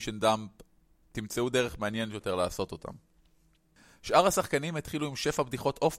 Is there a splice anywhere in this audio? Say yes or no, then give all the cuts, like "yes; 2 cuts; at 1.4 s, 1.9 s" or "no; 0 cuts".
no; 0 cuts